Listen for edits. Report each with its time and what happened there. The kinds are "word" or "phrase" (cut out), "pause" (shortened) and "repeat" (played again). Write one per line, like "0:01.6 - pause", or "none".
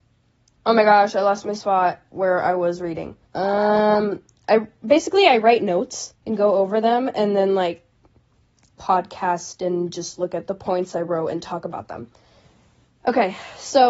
0:03.3 - pause
0:06.2 - pause